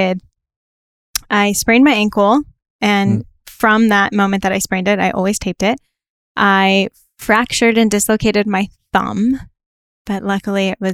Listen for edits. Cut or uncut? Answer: uncut